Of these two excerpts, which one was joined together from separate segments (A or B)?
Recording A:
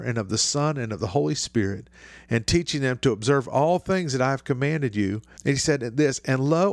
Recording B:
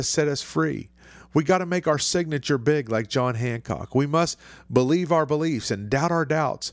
A